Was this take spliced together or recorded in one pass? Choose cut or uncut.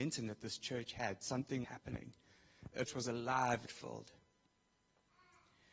cut